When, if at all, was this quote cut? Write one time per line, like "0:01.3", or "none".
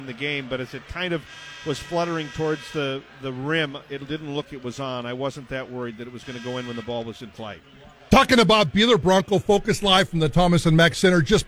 0:04.5

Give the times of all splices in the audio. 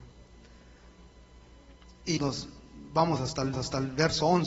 0:02.2
0:03.5

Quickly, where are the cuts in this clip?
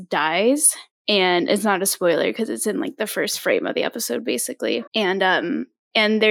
0:04.9

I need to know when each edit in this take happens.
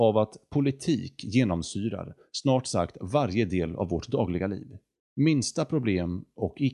0:05.0

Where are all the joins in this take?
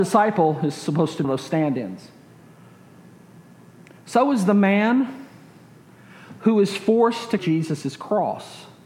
0:01.2
0:07.4

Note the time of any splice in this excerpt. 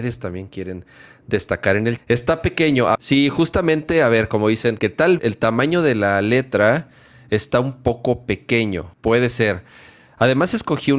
0:02.0
0:02.9
0:04.8
0:05.2
0:08.9

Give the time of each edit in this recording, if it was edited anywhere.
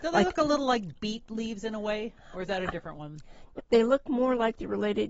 0:02.2
0:03.6

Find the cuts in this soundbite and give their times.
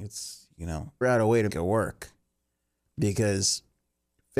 0:01.0
0:01.5

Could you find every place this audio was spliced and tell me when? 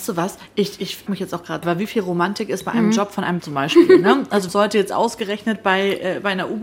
0:01.1
0:01.6
0:03.4
0:04.5

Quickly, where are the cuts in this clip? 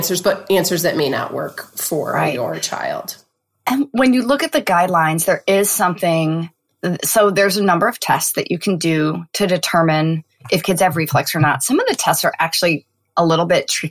none

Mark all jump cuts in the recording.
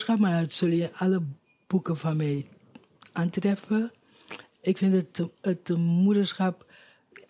none

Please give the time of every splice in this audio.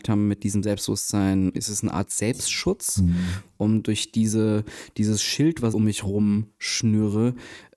0:01.5
0:05.7

